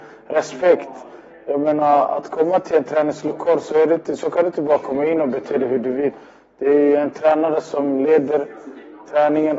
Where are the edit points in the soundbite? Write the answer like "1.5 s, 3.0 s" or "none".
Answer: none